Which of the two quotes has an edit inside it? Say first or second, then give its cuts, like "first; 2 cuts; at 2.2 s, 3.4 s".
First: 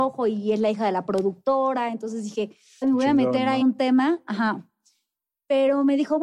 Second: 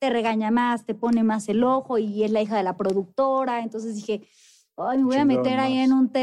first; 2 cuts; at 2.8 s, 3.6 s